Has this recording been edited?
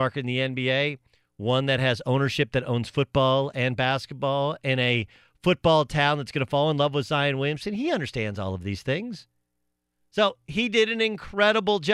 no; 0 cuts

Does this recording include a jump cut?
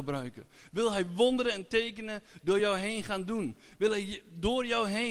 no; 0 cuts

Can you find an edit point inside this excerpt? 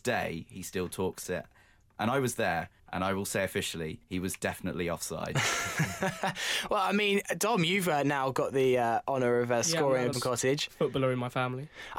yes; 4 cuts; at 1.2 s, 2.8 s, 4.0 s, 10.1 s

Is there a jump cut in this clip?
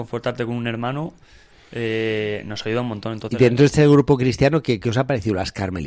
no; 0 cuts

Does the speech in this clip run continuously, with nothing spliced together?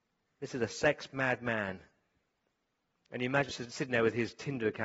no; 1 cut; at 3.5 s

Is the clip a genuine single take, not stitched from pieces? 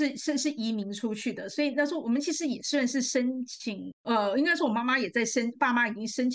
yes; 0 cuts

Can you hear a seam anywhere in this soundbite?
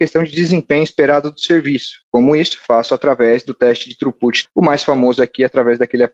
yes; 2 cuts; at 2.0 s, 4.4 s

